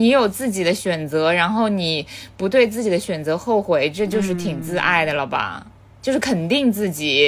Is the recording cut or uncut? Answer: uncut